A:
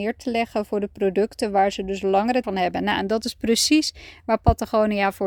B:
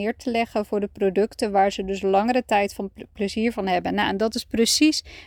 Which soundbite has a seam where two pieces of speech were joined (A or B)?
A